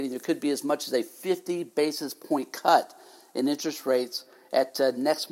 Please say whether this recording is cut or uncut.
uncut